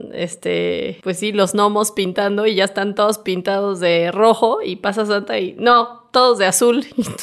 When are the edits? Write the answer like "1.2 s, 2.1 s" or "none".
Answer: none